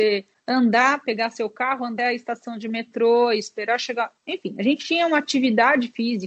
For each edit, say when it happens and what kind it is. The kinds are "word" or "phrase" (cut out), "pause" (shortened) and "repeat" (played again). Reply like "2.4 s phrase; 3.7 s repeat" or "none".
2.0 s word; 4.2 s pause